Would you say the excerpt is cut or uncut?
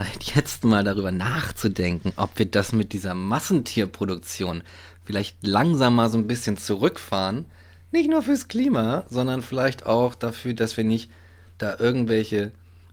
uncut